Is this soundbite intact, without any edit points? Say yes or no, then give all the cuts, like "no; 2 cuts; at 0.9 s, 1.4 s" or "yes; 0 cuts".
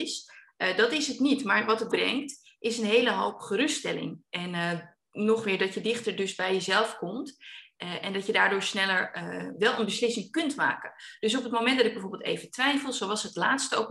no; 1 cut; at 1.9 s